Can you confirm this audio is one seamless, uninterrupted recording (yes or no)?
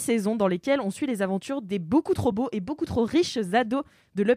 yes